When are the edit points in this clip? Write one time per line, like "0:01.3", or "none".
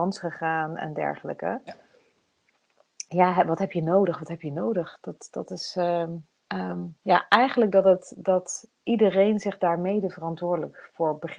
0:06.4